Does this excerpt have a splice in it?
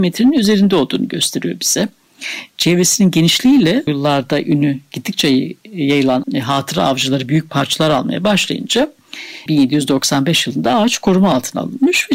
yes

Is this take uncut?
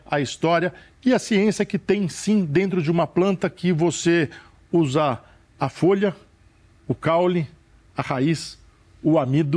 yes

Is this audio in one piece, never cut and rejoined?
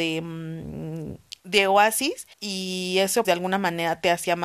no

